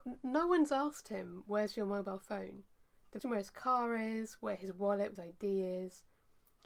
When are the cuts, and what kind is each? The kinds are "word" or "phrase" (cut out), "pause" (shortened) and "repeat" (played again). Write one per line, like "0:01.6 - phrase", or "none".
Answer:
0:03.2 - word
0:05.1 - phrase